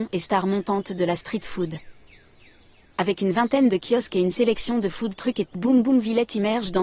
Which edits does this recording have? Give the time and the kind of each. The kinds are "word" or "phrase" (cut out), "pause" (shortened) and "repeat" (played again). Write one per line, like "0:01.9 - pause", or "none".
0:05.5 - word